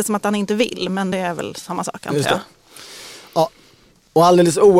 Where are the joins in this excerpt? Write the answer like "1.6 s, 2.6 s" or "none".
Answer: none